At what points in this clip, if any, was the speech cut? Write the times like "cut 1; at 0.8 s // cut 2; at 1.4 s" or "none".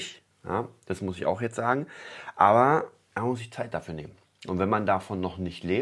none